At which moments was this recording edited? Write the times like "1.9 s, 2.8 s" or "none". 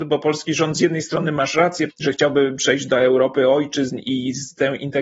1.9 s, 4.0 s